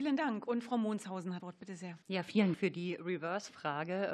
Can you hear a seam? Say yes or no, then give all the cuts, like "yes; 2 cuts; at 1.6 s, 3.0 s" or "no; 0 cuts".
yes; 3 cuts; at 1.4 s, 2.0 s, 2.5 s